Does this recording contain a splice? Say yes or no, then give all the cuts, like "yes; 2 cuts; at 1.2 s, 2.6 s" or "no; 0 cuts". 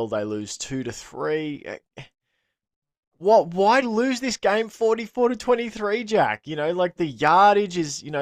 yes; 2 cuts; at 3.8 s, 7.0 s